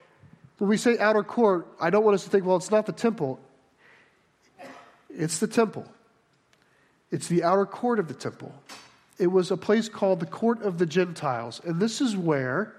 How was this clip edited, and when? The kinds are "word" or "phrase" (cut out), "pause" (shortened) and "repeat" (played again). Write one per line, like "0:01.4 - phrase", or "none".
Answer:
none